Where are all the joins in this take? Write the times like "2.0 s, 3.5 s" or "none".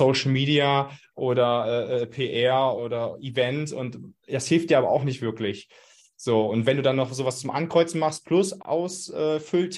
2.8 s, 8.6 s